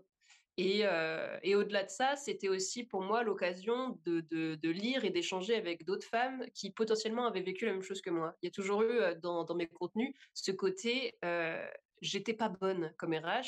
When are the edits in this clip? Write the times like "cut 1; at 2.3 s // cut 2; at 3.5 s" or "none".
none